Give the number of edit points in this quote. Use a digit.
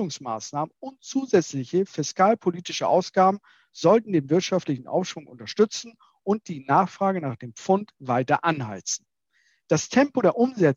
0